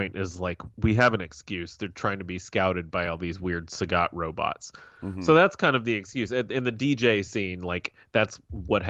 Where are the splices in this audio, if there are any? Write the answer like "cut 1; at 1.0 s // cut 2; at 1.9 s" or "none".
none